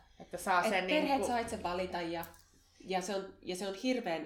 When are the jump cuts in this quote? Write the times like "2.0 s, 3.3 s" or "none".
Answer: none